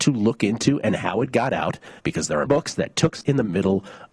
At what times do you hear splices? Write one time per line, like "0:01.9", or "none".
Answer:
0:02.0
0:02.5
0:03.2